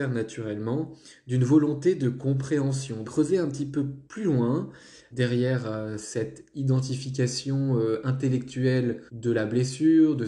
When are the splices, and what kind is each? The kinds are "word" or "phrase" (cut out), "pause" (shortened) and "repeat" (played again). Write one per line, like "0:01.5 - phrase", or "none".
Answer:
0:03.0 - word
0:04.1 - pause
0:05.1 - word
0:09.1 - pause